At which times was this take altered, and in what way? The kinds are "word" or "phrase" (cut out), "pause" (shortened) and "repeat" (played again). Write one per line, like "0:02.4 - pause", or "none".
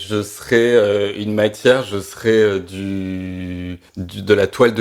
0:03.9 - pause